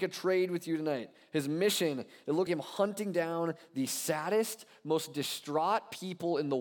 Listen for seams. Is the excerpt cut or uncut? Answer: cut